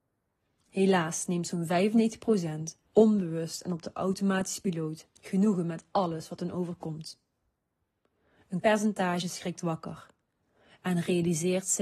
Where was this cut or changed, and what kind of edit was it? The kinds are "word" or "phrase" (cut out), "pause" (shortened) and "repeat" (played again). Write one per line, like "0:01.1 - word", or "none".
0:02.9 - pause
0:05.2 - pause
0:08.6 - word